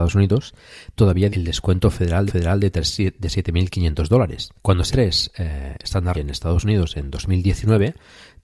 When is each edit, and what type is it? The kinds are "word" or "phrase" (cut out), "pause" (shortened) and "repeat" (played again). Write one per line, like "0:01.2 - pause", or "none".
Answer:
0:01.0 - word
0:01.3 - word
0:02.3 - repeat
0:04.6 - pause
0:04.9 - phrase
0:06.1 - word